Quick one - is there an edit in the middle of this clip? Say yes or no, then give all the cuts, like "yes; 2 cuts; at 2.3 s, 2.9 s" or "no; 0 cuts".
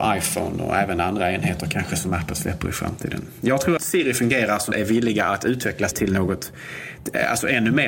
yes; 3 cuts; at 3.8 s, 4.7 s, 5.9 s